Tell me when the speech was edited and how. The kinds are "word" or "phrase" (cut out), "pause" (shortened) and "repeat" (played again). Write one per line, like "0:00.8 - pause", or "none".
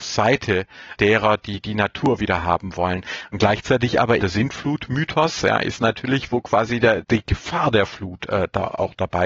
0:01.0 - phrase
0:04.2 - word
0:07.0 - word